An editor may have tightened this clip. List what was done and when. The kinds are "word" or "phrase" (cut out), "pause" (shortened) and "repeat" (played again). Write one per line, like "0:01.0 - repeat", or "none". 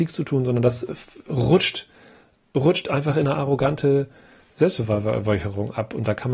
none